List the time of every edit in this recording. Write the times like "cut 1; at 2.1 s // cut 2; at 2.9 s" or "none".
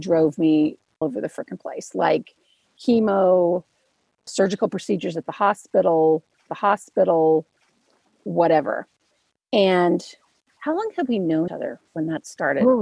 cut 1; at 1.0 s // cut 2; at 4.3 s // cut 3; at 6.5 s // cut 4; at 11.5 s // cut 5; at 11.9 s